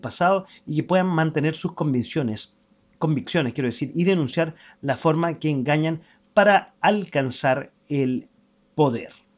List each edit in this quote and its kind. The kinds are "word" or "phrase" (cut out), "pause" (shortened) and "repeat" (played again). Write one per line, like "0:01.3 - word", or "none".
none